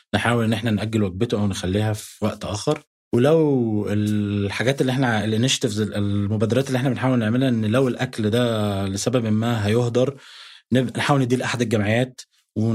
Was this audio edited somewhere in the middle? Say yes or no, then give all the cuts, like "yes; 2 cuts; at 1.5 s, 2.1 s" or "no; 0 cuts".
yes; 1 cut; at 2.9 s